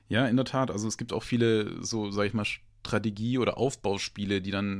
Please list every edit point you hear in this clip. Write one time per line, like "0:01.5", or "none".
none